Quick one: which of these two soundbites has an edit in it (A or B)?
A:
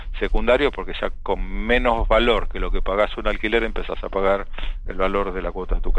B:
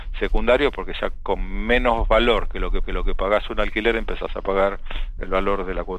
B